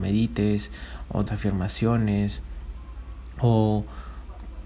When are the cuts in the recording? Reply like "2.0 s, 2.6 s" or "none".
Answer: 1.3 s